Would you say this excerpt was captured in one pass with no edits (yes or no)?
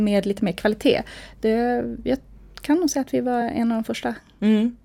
yes